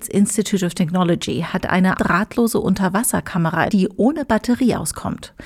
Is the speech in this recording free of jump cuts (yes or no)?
no